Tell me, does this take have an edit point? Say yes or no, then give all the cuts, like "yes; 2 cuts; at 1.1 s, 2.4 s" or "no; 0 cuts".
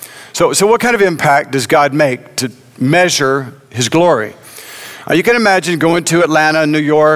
no; 0 cuts